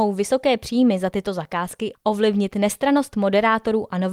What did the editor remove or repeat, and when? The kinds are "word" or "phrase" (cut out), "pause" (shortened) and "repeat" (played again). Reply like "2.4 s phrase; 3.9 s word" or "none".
none